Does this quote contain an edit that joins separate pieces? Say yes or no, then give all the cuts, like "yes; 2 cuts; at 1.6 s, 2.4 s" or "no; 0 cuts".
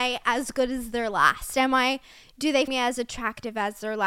yes; 1 cut; at 2.7 s